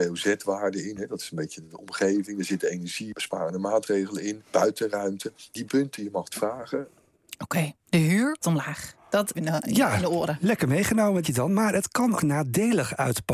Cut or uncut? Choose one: cut